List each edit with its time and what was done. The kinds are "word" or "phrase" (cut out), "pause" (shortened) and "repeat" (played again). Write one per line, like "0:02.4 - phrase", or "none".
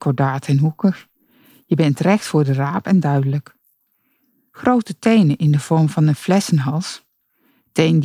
none